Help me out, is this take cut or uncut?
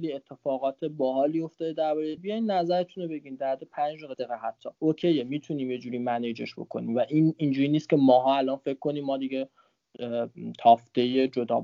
cut